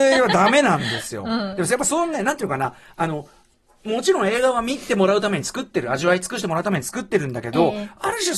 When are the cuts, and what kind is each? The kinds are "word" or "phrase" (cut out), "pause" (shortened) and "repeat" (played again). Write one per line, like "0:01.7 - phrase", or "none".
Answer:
none